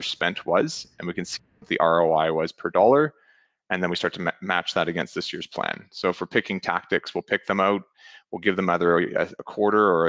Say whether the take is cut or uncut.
uncut